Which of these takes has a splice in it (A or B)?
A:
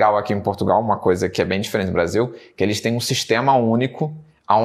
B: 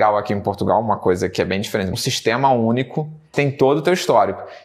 B